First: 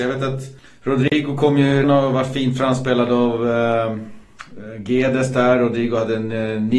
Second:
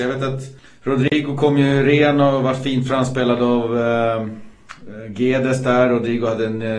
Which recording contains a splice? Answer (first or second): first